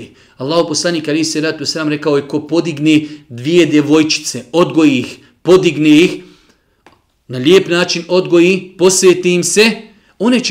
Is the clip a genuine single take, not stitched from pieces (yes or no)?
yes